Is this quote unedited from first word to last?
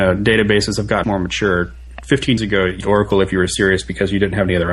no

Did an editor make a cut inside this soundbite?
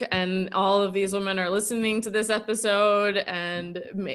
no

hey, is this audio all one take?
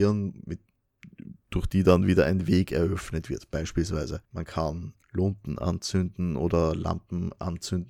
no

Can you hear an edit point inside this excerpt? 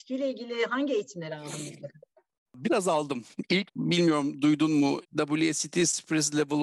yes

